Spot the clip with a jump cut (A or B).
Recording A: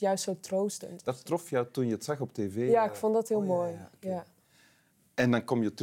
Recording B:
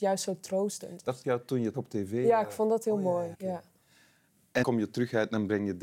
B